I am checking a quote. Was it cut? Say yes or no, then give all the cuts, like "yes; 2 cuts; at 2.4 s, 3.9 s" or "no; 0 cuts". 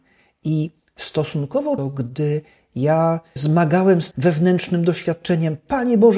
yes; 3 cuts; at 1.8 s, 3.4 s, 4.1 s